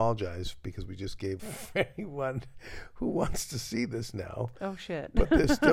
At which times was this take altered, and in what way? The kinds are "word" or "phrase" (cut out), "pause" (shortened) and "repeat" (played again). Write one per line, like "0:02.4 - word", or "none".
0:01.4 - phrase